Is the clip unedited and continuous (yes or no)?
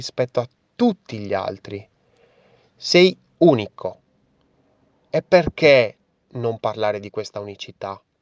yes